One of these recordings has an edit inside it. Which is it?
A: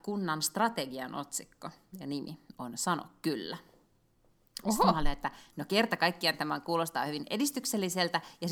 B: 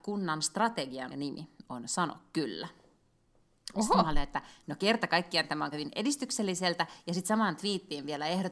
B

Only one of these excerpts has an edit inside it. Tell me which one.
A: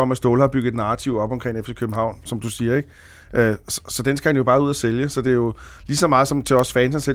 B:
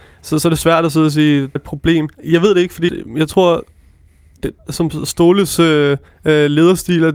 B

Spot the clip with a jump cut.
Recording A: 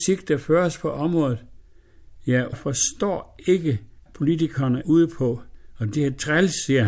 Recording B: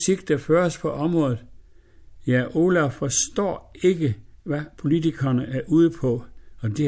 A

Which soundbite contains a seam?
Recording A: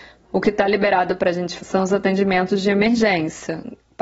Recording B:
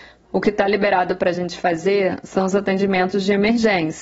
A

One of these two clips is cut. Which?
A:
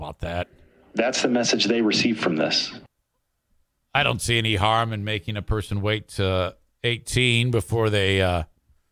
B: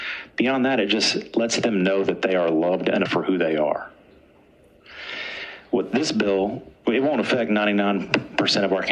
B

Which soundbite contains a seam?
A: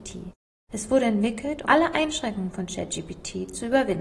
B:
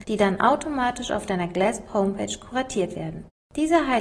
A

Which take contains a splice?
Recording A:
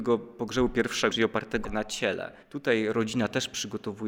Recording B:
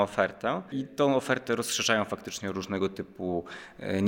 A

